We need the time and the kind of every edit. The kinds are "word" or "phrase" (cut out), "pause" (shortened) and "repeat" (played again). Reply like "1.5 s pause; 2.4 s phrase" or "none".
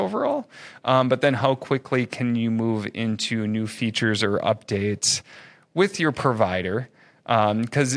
none